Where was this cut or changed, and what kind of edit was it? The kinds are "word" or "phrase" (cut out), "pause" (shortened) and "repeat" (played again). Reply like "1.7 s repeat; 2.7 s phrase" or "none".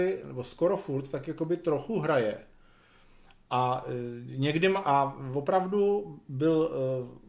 none